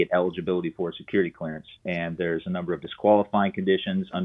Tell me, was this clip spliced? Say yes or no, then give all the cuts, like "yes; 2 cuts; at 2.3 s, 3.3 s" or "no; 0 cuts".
no; 0 cuts